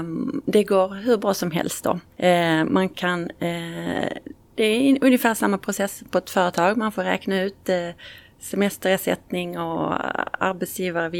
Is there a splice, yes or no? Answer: yes